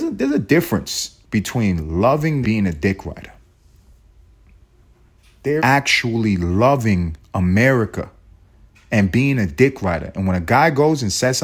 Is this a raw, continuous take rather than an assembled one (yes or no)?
no